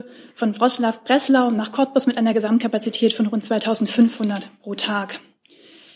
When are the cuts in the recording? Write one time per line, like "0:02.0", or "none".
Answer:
none